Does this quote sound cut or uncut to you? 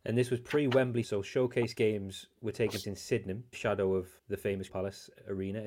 cut